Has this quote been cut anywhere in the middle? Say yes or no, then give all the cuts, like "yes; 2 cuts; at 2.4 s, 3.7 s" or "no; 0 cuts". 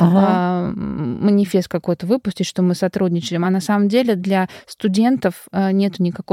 no; 0 cuts